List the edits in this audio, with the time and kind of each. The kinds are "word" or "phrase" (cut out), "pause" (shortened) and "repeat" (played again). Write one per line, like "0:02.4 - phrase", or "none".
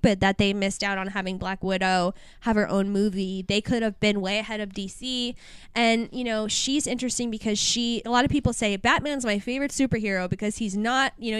0:08.0 - word